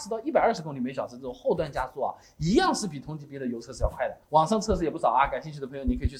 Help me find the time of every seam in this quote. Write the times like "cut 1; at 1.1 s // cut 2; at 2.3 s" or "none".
cut 1; at 4.2 s